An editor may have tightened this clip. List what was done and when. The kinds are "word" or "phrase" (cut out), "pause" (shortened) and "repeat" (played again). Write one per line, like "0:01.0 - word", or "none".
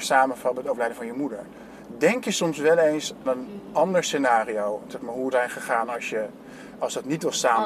0:03.3 - word
0:05.3 - word